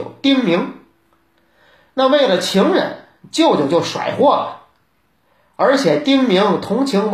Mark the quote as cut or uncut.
uncut